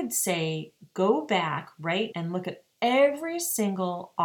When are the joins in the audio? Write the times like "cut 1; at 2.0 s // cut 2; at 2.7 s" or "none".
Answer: cut 1; at 2.1 s